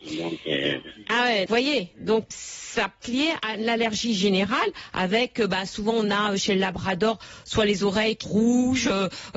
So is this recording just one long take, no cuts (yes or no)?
no